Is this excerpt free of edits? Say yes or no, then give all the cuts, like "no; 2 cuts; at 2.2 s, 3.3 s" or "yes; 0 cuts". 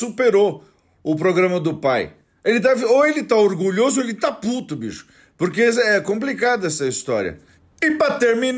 yes; 0 cuts